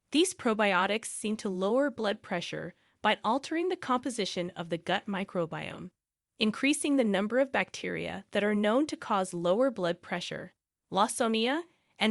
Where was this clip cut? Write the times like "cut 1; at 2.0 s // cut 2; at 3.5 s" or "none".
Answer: none